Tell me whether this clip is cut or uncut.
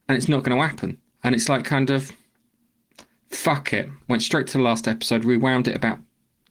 cut